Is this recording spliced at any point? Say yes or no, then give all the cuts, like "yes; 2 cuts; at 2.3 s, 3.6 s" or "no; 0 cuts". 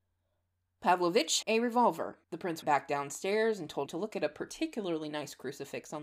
yes; 4 cuts; at 1.4 s, 2.2 s, 2.6 s, 3.9 s